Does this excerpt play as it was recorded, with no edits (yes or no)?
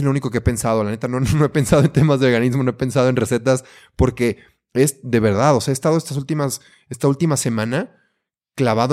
yes